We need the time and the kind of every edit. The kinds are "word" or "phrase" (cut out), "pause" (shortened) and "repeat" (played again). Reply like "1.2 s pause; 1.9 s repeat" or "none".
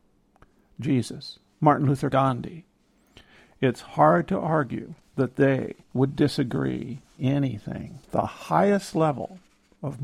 2.1 s phrase; 5.0 s pause; 5.8 s pause; 7.2 s word; 8.0 s pause